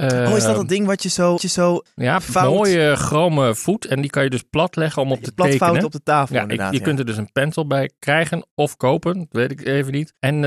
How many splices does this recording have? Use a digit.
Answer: 1